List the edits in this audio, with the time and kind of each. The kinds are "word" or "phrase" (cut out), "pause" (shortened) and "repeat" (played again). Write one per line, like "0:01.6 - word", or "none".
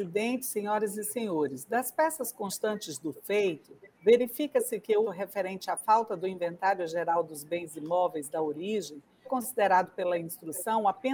0:03.9 - pause
0:05.0 - word
0:09.2 - word